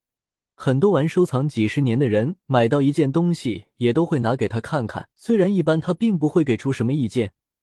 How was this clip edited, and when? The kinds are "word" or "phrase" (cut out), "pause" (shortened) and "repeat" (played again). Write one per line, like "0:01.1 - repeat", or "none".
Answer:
0:05.1 - pause